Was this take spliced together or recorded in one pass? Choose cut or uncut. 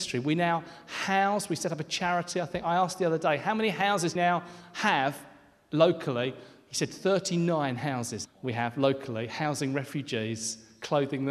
cut